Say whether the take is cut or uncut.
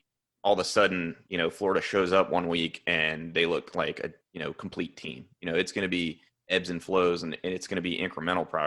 uncut